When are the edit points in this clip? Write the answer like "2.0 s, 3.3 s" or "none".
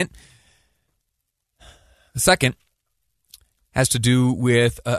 none